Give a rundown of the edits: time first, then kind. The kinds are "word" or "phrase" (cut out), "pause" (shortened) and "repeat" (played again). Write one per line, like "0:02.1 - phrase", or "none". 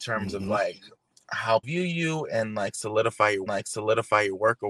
0:01.6 - word
0:03.5 - repeat